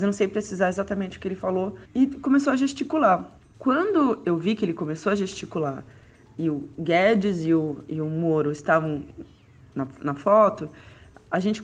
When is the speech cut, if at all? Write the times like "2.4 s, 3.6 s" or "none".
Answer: 1.9 s

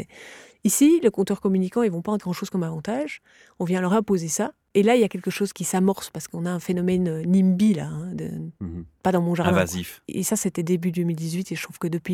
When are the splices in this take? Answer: 2.2 s, 5.5 s

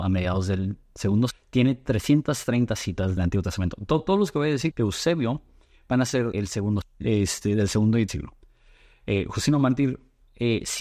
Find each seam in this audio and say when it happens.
1.3 s, 3.2 s, 4.7 s, 6.3 s, 6.8 s, 8.1 s

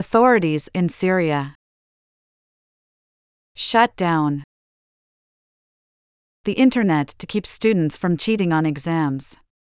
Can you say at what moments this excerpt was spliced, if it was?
none

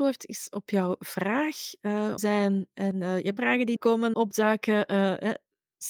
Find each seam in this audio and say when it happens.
2.2 s, 3.4 s, 3.8 s, 4.1 s

